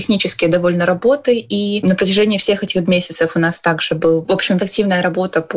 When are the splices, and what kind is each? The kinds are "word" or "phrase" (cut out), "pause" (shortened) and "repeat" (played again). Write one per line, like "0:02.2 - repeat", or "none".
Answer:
0:02.9 - word
0:04.6 - word